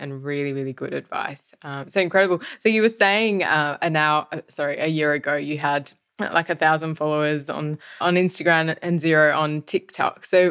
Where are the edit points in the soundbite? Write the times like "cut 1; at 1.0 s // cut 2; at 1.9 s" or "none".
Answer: cut 1; at 8.0 s